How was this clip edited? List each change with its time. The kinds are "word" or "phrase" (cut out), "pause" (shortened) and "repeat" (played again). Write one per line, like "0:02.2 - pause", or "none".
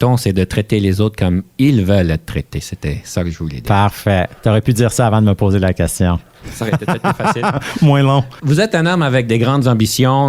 none